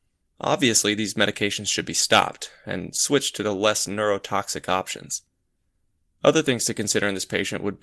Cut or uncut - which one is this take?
uncut